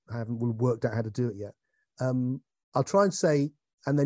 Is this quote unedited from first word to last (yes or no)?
yes